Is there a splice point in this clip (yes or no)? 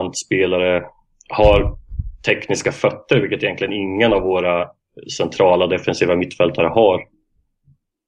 no